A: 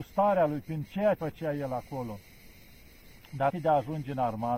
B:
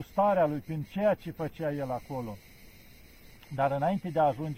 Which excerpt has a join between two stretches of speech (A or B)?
A